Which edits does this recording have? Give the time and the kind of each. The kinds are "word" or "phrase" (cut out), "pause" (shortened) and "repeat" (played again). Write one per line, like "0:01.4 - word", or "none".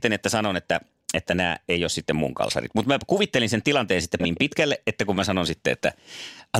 0:04.2 - word